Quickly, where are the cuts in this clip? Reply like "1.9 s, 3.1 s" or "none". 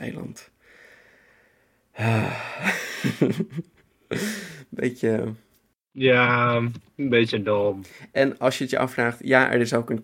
none